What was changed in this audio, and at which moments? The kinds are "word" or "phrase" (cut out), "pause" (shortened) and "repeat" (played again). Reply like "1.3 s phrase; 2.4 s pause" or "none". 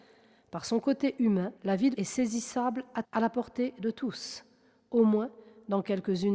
1.6 s pause; 1.9 s word; 3.0 s word